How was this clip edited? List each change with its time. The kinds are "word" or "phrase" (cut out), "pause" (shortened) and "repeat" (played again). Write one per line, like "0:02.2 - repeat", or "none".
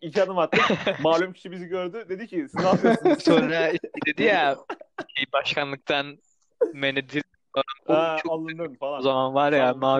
0:07.8 - pause

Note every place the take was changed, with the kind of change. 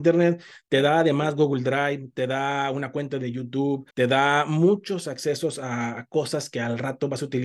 0:03.9 - pause

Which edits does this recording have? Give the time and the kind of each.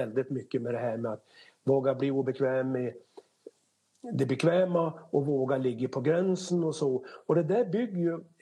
none

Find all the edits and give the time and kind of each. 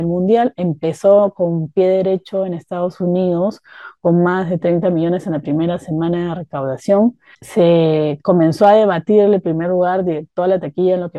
0:07.3 - pause

